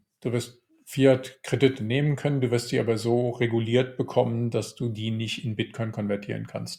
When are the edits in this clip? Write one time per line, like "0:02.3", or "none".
none